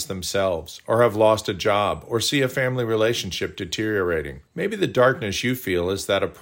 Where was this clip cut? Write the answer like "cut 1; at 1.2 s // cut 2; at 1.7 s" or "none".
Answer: cut 1; at 4.5 s